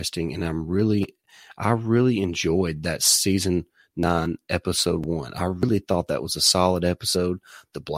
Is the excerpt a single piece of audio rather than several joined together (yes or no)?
yes